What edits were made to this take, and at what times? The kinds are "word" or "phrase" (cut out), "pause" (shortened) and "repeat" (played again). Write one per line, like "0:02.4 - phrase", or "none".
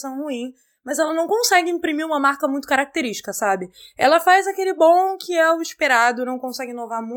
none